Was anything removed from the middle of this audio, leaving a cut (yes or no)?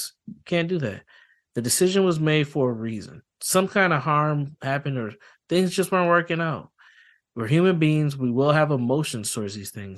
no